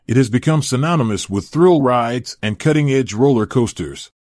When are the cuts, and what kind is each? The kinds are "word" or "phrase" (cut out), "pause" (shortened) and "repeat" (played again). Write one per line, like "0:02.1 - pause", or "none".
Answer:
none